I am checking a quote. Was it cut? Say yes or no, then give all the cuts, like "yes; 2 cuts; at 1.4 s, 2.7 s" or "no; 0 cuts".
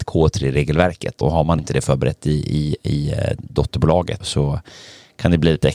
yes; 3 cuts; at 1.2 s, 1.6 s, 4.2 s